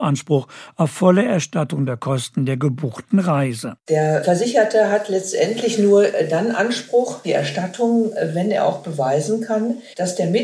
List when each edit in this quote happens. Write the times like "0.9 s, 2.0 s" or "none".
7.2 s